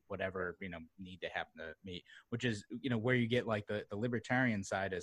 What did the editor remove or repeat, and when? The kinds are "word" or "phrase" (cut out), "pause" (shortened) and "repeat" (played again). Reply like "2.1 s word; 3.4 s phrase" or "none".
none